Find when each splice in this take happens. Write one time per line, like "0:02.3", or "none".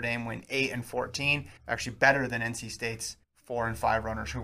0:01.6
0:03.2